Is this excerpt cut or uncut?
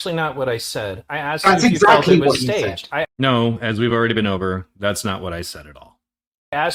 uncut